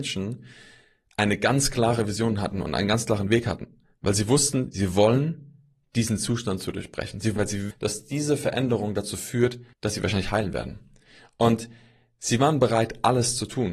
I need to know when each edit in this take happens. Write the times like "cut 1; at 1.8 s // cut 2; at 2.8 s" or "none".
cut 1; at 7.4 s // cut 2; at 7.7 s // cut 3; at 9.7 s